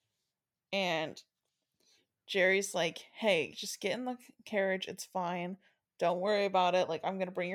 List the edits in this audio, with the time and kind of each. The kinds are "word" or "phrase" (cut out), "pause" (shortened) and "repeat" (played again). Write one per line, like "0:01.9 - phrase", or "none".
none